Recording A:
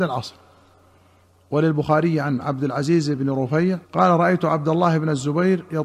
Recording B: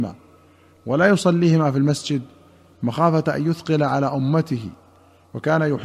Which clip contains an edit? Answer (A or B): A